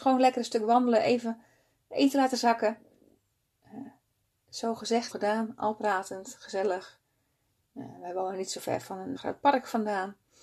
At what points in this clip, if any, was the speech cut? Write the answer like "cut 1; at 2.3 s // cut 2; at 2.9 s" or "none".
cut 1; at 5.1 s // cut 2; at 9.2 s